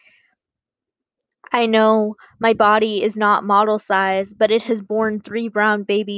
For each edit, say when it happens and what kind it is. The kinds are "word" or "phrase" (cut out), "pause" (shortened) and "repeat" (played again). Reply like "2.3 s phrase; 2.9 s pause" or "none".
none

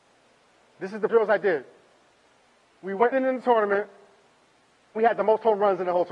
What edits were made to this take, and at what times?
1.1 s word; 3.1 s word; 5.0 s word

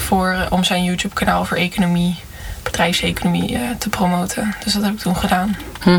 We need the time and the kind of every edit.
none

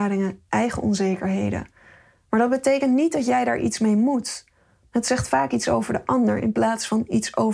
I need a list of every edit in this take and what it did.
none

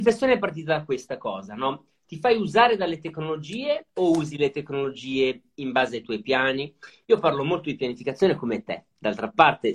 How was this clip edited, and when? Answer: 3.9 s pause

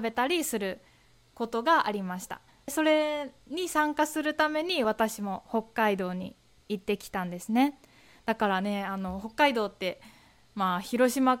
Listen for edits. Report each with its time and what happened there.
2.5 s pause

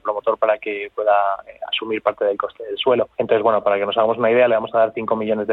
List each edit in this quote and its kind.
3.1 s pause

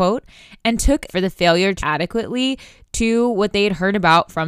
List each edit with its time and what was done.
1.1 s word; 1.8 s word

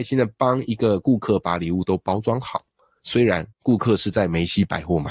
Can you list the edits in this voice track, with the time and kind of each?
3.5 s pause

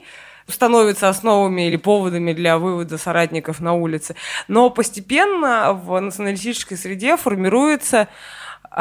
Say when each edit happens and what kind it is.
none

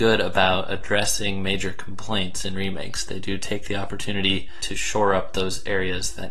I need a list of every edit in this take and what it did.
none

